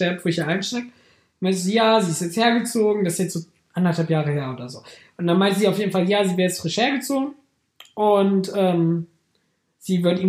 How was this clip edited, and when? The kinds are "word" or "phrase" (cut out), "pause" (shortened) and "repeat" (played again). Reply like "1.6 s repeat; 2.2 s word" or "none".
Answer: none